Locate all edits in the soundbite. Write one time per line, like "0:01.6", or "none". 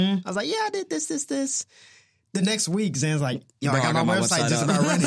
none